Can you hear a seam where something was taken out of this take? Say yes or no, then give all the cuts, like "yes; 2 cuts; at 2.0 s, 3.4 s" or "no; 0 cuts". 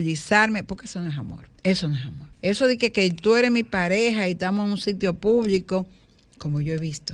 yes; 2 cuts; at 1.6 s, 2.3 s